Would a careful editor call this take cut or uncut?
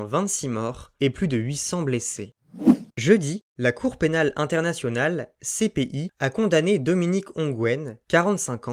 cut